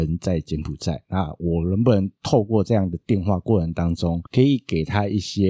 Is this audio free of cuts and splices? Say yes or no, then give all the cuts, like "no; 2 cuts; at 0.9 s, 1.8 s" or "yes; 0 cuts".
no; 1 cut; at 4.3 s